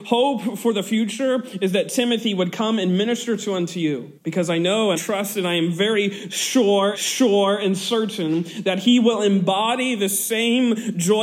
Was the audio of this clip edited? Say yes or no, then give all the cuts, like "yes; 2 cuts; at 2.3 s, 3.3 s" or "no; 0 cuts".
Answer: yes; 3 cuts; at 4.2 s, 4.9 s, 6.9 s